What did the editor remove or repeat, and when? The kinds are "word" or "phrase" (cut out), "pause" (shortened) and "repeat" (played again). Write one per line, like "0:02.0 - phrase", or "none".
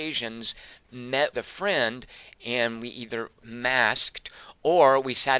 0:01.3 - word
0:03.4 - word